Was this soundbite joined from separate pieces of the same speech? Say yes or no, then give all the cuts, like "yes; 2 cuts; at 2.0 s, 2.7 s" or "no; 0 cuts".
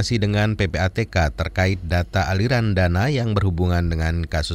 no; 0 cuts